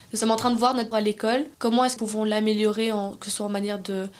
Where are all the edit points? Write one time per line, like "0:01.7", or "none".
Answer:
0:00.9
0:01.5
0:02.0